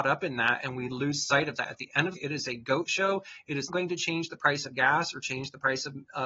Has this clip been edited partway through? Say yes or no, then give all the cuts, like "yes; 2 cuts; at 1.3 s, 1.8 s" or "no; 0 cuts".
yes; 2 cuts; at 2.2 s, 3.7 s